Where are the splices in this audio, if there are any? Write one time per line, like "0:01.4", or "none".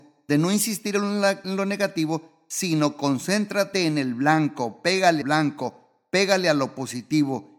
0:05.2